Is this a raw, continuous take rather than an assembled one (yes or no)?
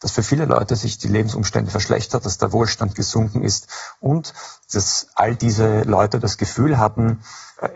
no